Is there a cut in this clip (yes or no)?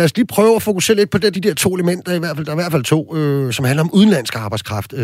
yes